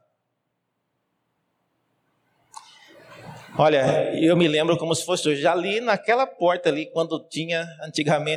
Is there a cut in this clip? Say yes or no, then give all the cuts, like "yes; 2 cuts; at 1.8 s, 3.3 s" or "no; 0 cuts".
no; 0 cuts